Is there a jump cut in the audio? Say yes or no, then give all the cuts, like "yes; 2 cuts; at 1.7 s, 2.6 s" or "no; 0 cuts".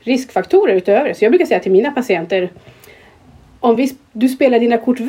no; 0 cuts